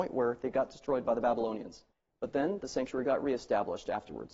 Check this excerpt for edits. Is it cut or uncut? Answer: cut